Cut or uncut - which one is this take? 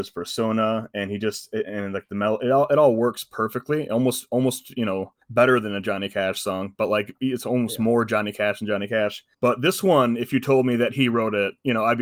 cut